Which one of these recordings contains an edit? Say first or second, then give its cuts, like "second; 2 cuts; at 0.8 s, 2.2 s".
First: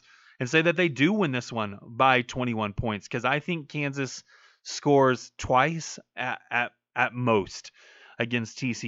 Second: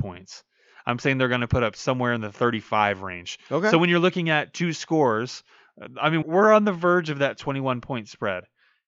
second; 1 cut; at 6.2 s